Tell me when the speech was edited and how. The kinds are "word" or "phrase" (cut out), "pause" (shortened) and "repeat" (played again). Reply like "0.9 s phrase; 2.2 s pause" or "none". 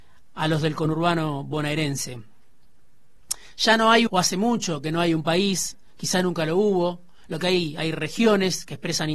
4.1 s phrase